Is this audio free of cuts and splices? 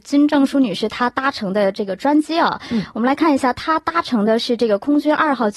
yes; 0 cuts

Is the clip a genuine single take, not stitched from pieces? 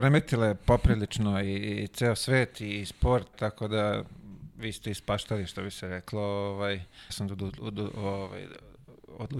no; 2 cuts; at 3.3 s, 7.1 s

